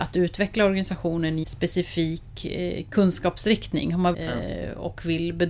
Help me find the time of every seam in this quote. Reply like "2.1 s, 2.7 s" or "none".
1.4 s, 4.1 s